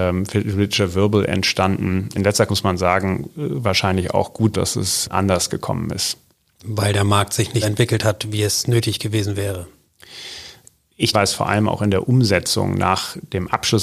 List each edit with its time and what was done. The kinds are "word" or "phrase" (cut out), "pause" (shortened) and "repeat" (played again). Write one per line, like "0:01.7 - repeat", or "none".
0:02.1 - word
0:02.5 - word
0:04.5 - word
0:05.1 - word
0:07.6 - word
0:11.1 - word